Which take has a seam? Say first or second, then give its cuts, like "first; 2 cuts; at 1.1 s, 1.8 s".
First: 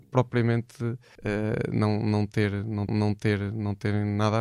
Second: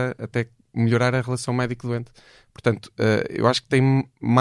first; 2 cuts; at 1.1 s, 2.9 s